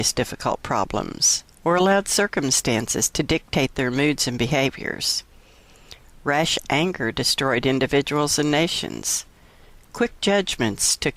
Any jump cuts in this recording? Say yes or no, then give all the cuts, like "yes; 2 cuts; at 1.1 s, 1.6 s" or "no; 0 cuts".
no; 0 cuts